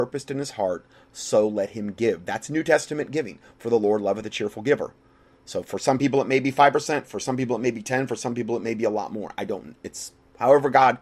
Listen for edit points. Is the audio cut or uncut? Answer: uncut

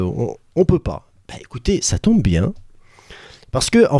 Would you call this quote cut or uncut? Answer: uncut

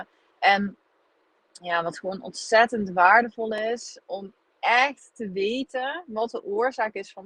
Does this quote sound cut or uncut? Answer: cut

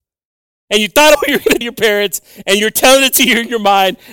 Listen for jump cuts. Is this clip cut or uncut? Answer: cut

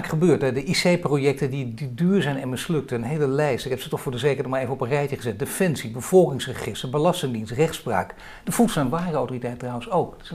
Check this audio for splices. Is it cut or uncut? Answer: uncut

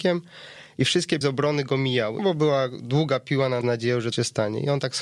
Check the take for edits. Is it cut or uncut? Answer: cut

